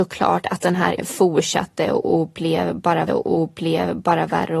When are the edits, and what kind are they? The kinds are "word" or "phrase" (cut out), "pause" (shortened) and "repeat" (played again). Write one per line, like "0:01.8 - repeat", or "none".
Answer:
0:01.0 - word
0:03.1 - repeat